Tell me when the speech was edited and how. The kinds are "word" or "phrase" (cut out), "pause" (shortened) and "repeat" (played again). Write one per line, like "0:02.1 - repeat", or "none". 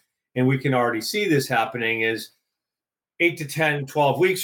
none